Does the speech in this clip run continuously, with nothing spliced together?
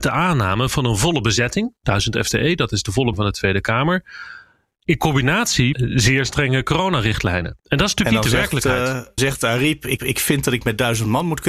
no; 5 cuts; at 3.1 s, 5.7 s, 7.6 s, 9.2 s, 10.0 s

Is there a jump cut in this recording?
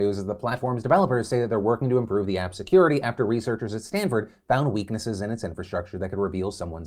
no; 0 cuts

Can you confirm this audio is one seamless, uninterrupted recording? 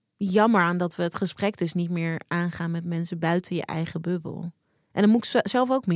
yes; 0 cuts

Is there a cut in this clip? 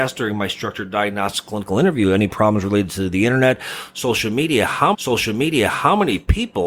yes; 1 cut; at 4.9 s

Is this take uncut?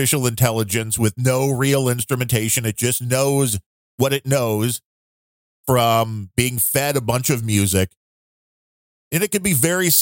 yes; 0 cuts

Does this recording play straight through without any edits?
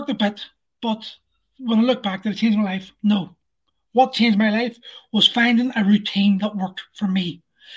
yes; 0 cuts

